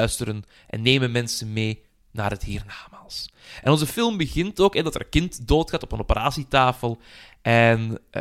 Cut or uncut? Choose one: uncut